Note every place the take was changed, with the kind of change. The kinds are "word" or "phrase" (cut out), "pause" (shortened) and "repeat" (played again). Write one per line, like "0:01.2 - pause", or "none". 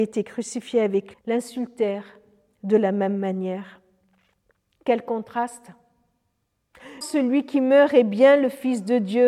0:01.1 - word
0:07.0 - word